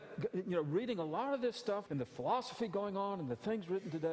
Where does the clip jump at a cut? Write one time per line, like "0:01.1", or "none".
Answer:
0:01.9

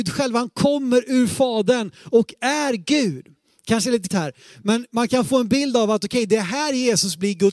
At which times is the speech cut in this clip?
0:04.1

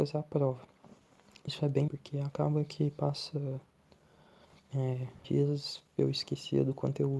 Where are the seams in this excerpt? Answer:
0:01.5
0:01.9
0:05.2

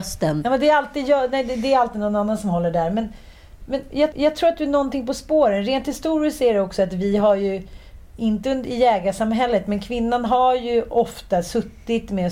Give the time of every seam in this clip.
0:04.1

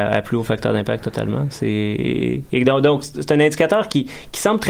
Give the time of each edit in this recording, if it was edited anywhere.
none

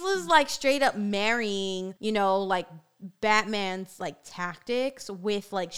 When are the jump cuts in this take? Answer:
0:02.0

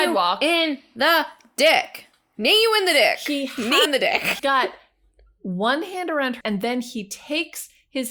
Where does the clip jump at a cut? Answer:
0:03.9
0:04.4
0:06.4

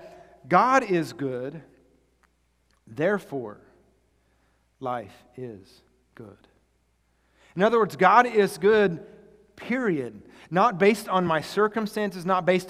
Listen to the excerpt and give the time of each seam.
none

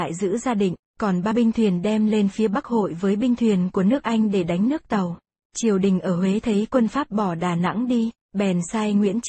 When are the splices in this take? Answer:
0:01.3
0:05.4

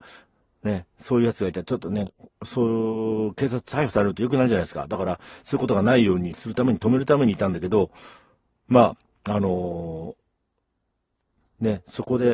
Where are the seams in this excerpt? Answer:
none

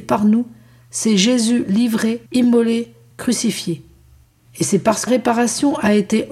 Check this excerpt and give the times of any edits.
0:02.3
0:04.2
0:05.1

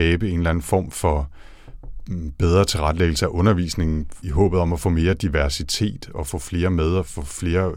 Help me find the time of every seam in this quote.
0:04.2

